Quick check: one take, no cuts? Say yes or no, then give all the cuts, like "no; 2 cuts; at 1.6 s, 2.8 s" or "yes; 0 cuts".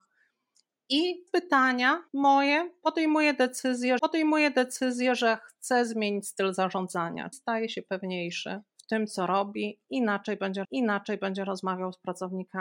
no; 6 cuts; at 1.3 s, 2.1 s, 4.0 s, 7.3 s, 8.7 s, 10.6 s